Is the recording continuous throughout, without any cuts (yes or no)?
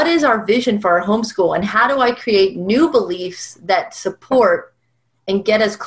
yes